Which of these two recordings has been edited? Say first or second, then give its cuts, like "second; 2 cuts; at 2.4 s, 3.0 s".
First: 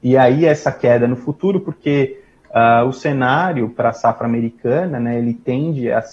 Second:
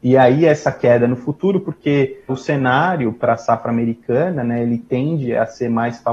second; 1 cut; at 2.3 s